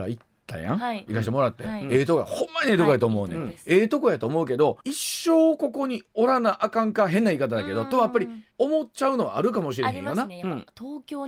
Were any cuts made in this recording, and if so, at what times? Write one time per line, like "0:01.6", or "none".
0:04.8
0:08.5